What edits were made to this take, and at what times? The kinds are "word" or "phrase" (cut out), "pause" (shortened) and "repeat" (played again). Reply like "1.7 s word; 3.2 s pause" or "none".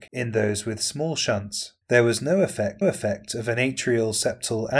1.8 s pause; 2.8 s repeat

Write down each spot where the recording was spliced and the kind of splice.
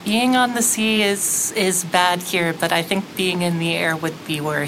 none

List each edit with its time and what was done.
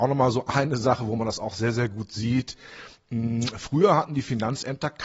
none

